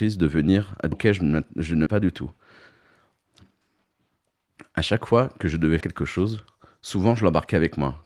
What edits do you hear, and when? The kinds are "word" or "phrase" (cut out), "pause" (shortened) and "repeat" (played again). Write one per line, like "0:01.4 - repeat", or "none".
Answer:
0:00.9 - word
0:01.9 - word
0:05.8 - word